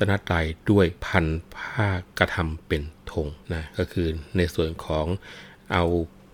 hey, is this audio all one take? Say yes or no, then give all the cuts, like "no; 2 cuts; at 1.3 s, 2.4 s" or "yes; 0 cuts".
no; 3 cuts; at 1.0 s, 2.1 s, 3.4 s